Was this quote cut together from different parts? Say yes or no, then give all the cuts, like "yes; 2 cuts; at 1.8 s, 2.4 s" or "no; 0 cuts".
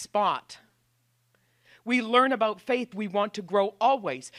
yes; 1 cut; at 2.9 s